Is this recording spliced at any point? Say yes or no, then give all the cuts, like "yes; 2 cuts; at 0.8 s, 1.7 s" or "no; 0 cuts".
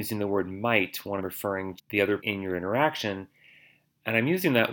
yes; 3 cuts; at 1.2 s, 1.8 s, 2.2 s